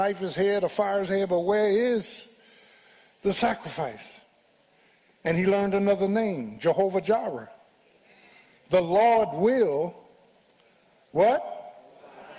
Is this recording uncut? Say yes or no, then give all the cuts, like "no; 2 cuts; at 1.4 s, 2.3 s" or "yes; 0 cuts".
yes; 0 cuts